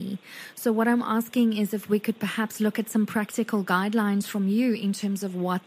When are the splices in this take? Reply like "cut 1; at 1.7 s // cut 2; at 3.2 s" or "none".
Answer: none